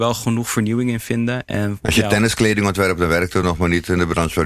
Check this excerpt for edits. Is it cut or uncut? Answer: uncut